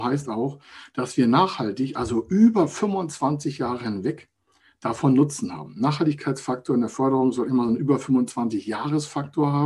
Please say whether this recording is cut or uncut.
uncut